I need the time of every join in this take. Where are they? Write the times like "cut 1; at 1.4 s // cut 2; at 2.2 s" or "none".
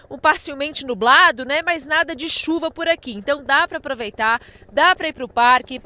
none